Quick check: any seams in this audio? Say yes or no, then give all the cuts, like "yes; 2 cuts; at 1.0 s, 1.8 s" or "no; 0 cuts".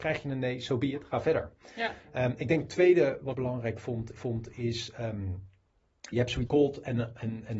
yes; 4 cuts; at 3.3 s, 4.2 s, 6.1 s, 6.5 s